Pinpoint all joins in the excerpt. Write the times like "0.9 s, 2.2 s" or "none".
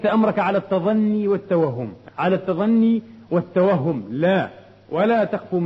2.1 s